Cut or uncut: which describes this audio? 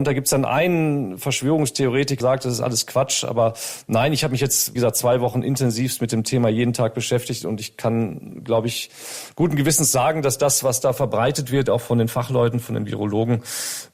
cut